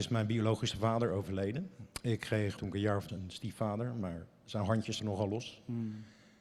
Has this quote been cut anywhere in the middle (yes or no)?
yes